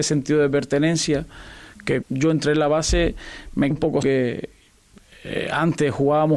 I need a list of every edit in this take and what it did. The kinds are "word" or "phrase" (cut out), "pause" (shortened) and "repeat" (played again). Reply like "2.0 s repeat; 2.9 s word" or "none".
2.0 s word; 3.7 s word; 4.0 s word